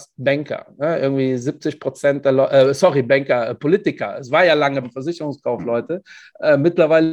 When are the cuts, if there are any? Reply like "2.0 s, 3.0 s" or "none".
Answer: 4.8 s